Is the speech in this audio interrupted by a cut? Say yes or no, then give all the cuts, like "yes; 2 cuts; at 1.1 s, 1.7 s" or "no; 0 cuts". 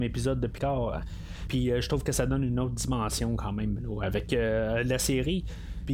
no; 0 cuts